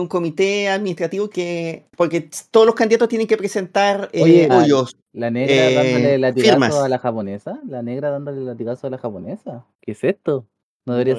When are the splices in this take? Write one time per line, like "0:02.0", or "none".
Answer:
0:01.3
0:01.9
0:04.5
0:05.0
0:09.7